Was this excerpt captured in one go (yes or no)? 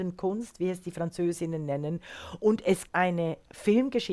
no